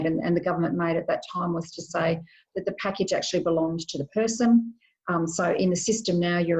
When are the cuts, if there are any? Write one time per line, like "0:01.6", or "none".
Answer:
none